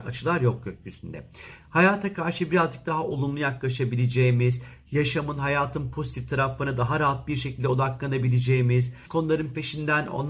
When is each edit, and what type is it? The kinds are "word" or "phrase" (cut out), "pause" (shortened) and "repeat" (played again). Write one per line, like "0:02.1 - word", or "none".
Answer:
0:09.1 - word

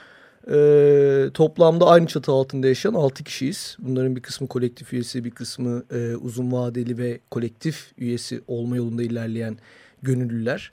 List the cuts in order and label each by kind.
none

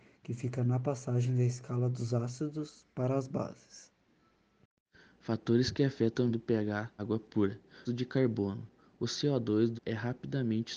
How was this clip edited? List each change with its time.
0:06.3 - word
0:07.0 - word
0:07.9 - word
0:09.8 - word

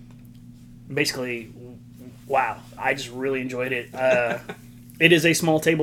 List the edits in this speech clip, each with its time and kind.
0:02.8 - word

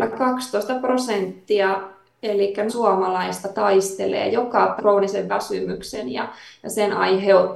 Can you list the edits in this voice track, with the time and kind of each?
0:02.7 - phrase
0:04.8 - phrase

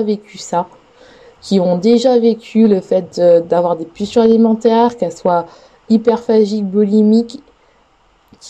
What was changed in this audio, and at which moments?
none

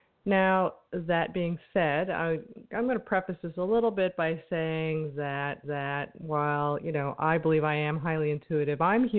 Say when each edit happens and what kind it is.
0:05.6 - repeat

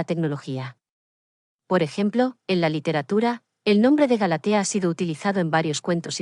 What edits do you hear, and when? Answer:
none

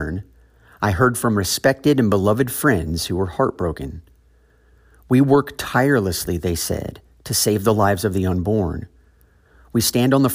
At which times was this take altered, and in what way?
none

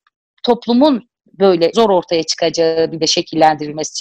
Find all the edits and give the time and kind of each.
0:01.3 - word
0:01.7 - word
0:03.0 - word

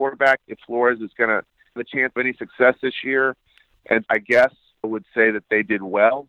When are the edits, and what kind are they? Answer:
0:01.8 - word
0:02.2 - word
0:04.1 - word
0:04.8 - word

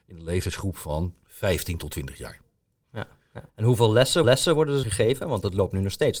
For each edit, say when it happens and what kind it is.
0:01.2 - pause
0:03.5 - pause
0:04.2 - repeat
0:04.8 - phrase

